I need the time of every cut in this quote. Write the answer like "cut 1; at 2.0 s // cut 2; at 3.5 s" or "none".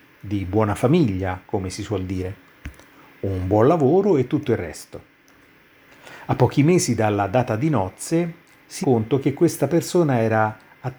cut 1; at 8.8 s